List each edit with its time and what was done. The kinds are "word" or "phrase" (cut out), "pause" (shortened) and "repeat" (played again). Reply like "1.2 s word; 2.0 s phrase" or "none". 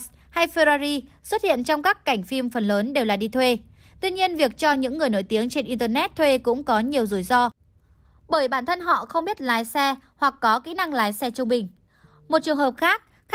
none